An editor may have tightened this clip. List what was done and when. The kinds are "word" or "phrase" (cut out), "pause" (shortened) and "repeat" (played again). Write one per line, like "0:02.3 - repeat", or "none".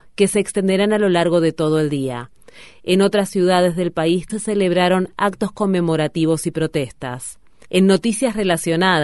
0:04.3 - word